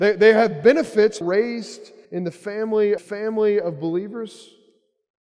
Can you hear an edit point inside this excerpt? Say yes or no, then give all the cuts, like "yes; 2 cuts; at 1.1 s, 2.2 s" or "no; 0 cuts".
yes; 3 cuts; at 1.2 s, 2.0 s, 3.0 s